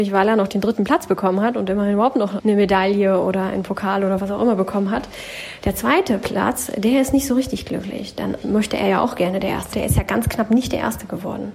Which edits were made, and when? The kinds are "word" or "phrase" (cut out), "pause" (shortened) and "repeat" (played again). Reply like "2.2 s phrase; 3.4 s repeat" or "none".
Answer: 2.4 s word; 8.4 s word; 9.7 s phrase